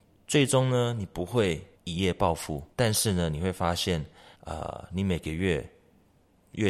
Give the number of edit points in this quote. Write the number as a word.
three